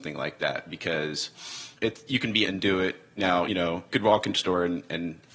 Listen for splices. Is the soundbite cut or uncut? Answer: cut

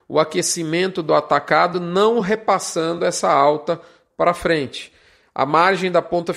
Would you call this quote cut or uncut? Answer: uncut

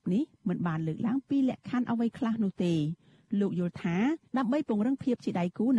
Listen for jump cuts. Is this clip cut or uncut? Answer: cut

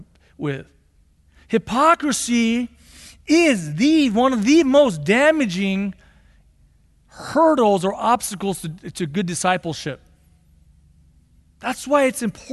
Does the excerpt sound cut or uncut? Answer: uncut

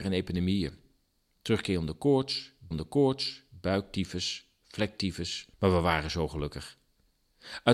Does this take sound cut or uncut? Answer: cut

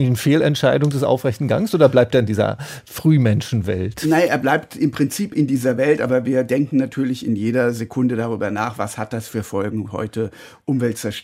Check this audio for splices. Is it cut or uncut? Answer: uncut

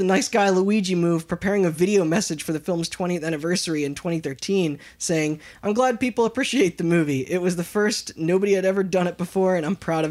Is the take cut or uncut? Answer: uncut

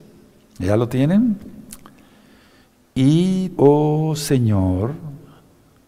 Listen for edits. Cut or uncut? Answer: cut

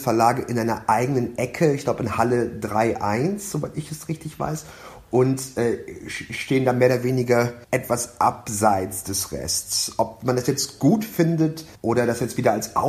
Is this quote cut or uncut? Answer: cut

